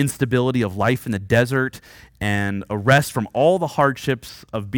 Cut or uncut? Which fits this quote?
uncut